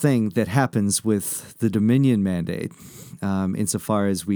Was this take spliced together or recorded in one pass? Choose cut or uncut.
uncut